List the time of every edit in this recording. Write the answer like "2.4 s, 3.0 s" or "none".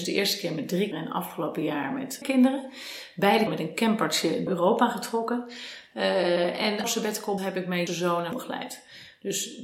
0.9 s, 2.2 s, 3.5 s, 4.5 s, 6.8 s, 7.4 s, 7.9 s, 8.3 s